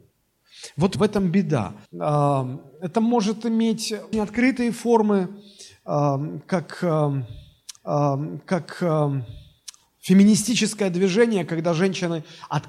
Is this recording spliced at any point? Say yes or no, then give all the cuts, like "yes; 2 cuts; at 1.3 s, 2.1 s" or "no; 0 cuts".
yes; 4 cuts; at 1.0 s, 1.9 s, 4.1 s, 7.8 s